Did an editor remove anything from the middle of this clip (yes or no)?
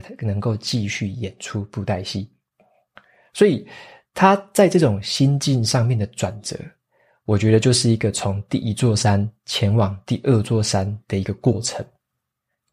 no